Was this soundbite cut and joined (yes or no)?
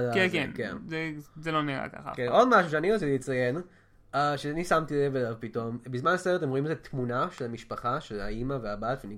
no